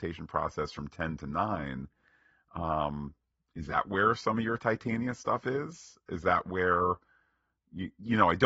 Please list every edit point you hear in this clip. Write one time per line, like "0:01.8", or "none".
none